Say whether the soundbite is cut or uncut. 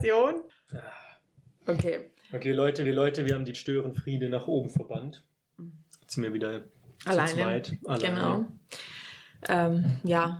cut